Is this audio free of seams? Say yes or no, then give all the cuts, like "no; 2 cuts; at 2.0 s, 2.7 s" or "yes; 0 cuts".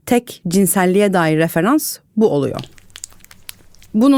yes; 0 cuts